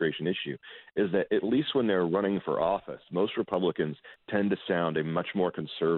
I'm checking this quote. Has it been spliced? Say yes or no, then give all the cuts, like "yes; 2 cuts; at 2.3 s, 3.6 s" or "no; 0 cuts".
no; 0 cuts